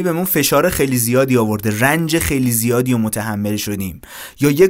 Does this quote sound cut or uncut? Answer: uncut